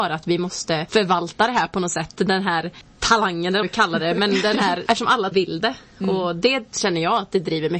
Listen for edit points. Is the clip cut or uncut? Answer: cut